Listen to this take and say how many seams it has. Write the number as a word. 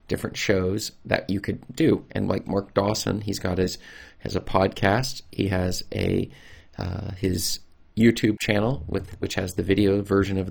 zero